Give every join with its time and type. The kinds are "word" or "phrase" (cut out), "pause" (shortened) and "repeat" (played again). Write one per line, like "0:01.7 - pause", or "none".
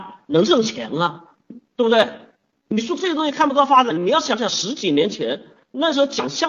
0:01.6 - pause